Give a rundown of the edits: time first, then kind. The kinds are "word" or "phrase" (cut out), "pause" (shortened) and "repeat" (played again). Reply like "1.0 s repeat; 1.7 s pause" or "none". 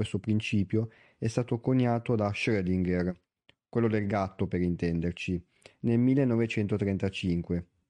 none

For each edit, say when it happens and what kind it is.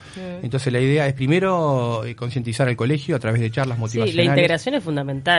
none

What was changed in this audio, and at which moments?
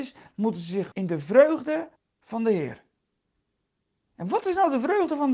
0.9 s word; 2.0 s pause

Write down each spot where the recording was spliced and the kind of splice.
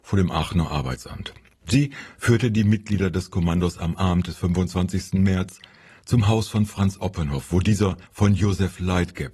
8.1 s pause

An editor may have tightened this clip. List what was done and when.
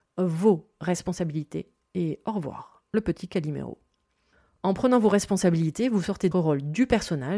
6.3 s word

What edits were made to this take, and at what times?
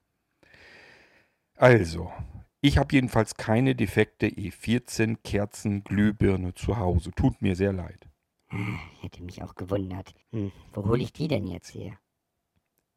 10.2 s pause

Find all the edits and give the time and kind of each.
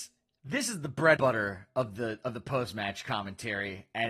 1.2 s word

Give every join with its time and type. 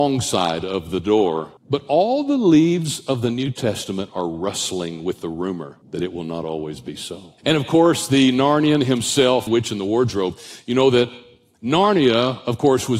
1.6 s pause; 5.8 s pause; 7.4 s pause; 9.5 s phrase

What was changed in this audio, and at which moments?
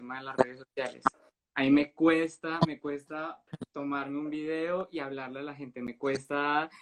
none

